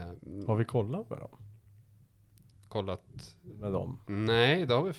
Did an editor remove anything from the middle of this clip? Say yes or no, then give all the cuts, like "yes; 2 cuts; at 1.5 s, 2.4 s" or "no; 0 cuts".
no; 0 cuts